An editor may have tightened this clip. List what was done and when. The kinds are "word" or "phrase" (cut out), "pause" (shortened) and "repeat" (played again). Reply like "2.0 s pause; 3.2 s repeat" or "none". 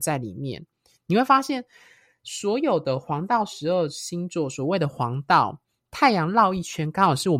none